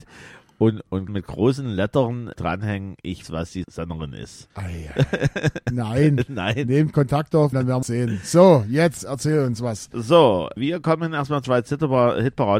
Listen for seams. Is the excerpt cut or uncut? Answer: cut